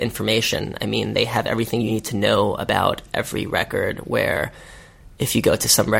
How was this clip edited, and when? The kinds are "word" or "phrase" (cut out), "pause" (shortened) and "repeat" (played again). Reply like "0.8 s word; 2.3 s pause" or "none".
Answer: none